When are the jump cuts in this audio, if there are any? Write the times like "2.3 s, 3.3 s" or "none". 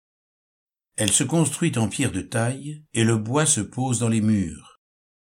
2.9 s